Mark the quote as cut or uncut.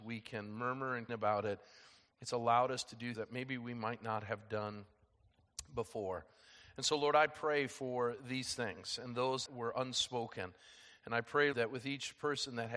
cut